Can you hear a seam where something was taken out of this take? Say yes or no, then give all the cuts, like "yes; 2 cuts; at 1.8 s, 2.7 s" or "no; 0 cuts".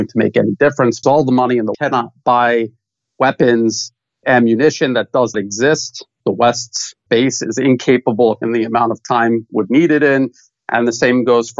yes; 8 cuts; at 1.0 s, 1.7 s, 4.2 s, 5.3 s, 6.2 s, 7.1 s, 8.4 s, 9.5 s